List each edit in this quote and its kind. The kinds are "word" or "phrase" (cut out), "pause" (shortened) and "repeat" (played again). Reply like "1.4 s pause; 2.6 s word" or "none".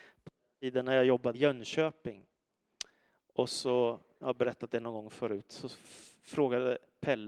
1.3 s word

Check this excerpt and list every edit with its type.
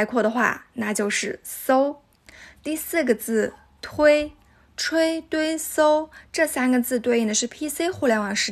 none

